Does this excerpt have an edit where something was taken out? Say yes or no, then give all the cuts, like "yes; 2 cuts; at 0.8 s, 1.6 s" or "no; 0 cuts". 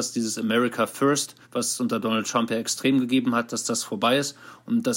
yes; 1 cut; at 1.4 s